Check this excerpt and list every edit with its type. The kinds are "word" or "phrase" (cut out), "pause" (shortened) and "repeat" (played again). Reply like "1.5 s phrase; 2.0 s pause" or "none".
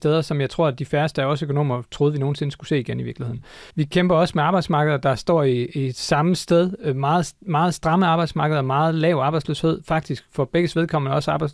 3.7 s pause

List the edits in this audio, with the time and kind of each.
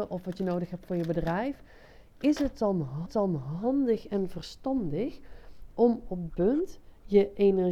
3.1 s repeat; 6.3 s word

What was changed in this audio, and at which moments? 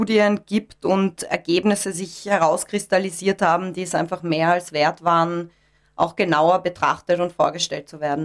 none

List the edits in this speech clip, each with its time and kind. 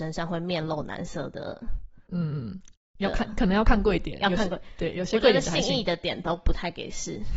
none

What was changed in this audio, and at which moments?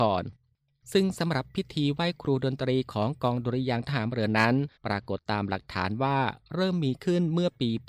4.8 s pause

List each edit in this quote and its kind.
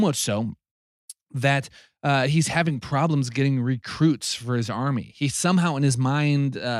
none

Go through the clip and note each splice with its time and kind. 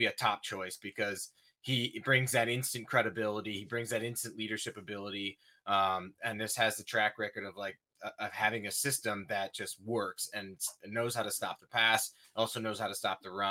none

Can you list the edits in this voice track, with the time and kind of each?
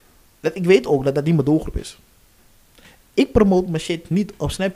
none

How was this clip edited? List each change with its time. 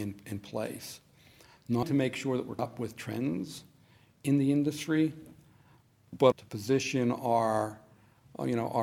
1.8 s word; 2.6 s word; 6.3 s word

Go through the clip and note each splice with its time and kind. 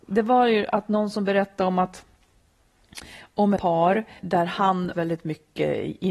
3.6 s word; 4.2 s word; 4.9 s phrase

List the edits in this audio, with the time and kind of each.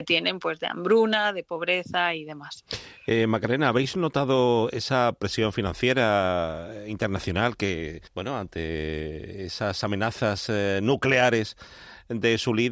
8.1 s pause

